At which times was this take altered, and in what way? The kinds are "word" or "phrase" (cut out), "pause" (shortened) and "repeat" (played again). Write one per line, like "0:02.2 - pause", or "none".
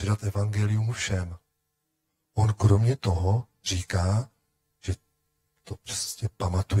none